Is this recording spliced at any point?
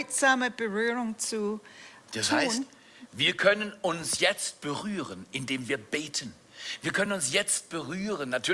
no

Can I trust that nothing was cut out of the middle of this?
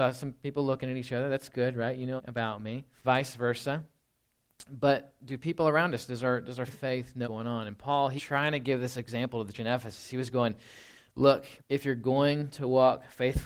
no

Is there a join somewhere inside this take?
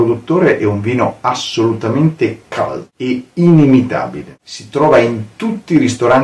no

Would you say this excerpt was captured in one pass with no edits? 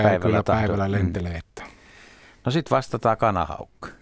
yes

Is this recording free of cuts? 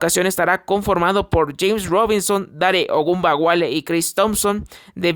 yes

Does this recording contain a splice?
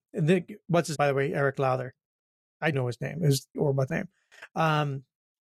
yes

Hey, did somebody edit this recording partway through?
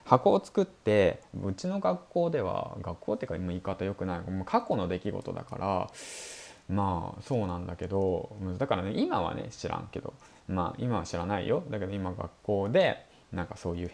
no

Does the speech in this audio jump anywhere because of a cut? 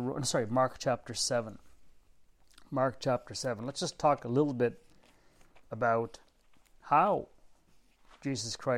no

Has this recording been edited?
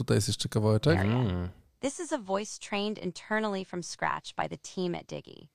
no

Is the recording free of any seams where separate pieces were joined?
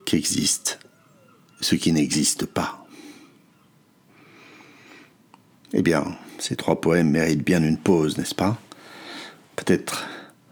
yes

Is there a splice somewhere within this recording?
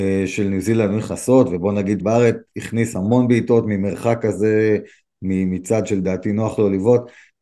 yes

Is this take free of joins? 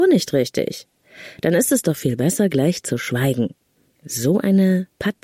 no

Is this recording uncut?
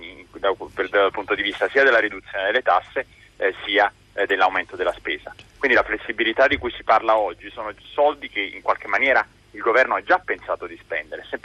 yes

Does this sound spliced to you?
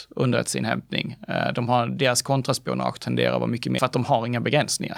yes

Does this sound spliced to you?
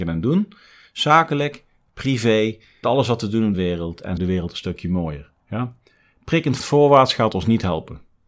yes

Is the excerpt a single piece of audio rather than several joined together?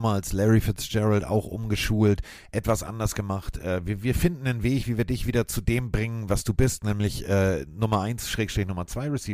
yes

